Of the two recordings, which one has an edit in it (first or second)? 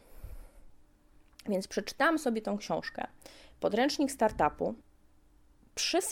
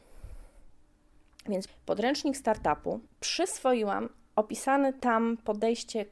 second